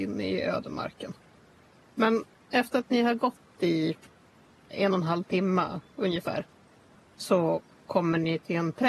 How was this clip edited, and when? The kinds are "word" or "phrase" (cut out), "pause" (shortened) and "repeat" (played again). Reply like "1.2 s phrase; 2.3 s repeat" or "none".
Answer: none